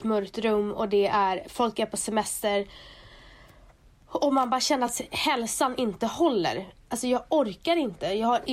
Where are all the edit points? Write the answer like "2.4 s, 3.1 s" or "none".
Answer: none